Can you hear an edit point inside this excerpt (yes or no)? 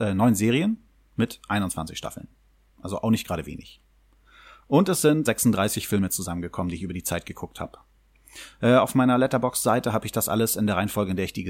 yes